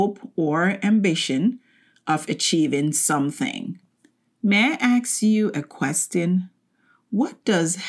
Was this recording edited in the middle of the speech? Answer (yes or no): no